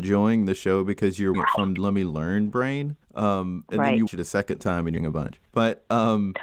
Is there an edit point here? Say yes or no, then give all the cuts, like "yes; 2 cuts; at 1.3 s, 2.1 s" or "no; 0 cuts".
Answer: yes; 6 cuts; at 1.3 s, 1.8 s, 3.0 s, 4.1 s, 5.0 s, 5.5 s